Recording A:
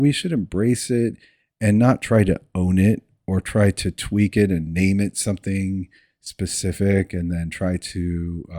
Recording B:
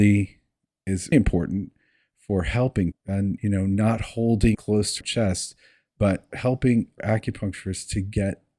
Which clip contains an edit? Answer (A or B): B